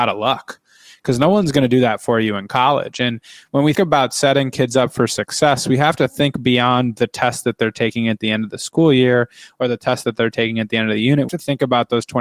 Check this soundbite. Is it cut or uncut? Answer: cut